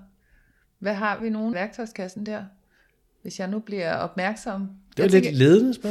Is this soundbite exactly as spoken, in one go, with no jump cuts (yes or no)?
no